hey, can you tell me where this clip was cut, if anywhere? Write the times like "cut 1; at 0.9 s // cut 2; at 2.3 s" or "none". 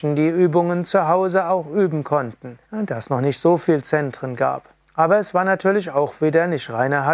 cut 1; at 2.6 s // cut 2; at 4.8 s